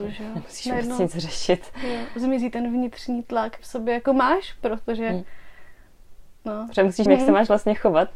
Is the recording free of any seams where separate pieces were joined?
no; 2 cuts; at 3.6 s, 7.1 s

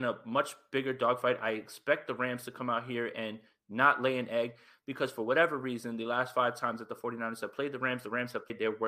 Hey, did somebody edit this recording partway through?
no; 0 cuts

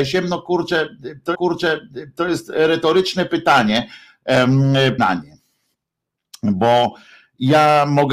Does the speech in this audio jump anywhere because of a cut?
yes; 2 cuts; at 1.3 s, 5.0 s

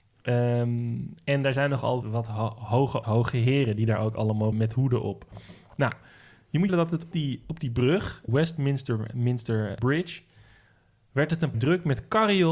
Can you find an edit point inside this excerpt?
yes; 8 cuts; at 2.0 s, 3.0 s, 4.5 s, 6.7 s, 7.1 s, 8.3 s, 9.8 s, 11.5 s

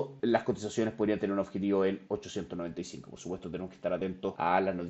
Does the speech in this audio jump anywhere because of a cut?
no; 0 cuts

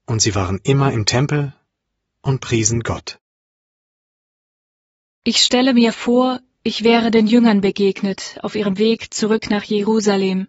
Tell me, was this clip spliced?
no; 0 cuts

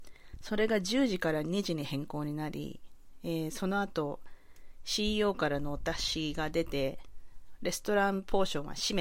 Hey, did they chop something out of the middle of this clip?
no; 0 cuts

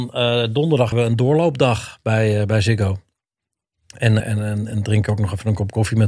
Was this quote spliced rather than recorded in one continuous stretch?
yes; 2 cuts; at 0.9 s, 4.2 s

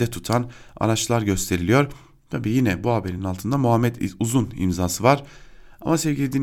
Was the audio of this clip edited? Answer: no; 0 cuts

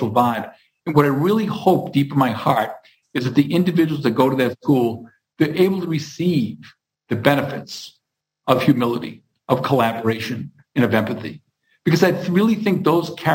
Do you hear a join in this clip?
no; 0 cuts

